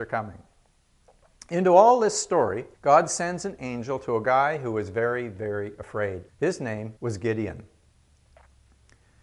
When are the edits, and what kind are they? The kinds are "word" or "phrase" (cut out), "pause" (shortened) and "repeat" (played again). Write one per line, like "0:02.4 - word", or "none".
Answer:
0:02.7 - pause
0:06.3 - pause
0:07.0 - pause